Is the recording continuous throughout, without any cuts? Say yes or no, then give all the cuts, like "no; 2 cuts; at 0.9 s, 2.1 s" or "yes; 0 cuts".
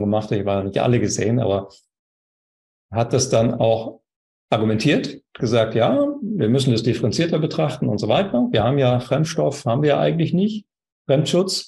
yes; 0 cuts